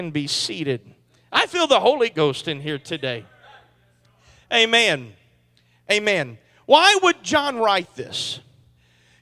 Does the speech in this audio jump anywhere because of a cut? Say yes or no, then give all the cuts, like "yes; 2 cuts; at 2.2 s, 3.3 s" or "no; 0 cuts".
no; 0 cuts